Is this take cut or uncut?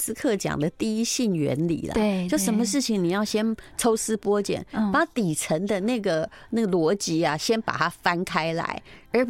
uncut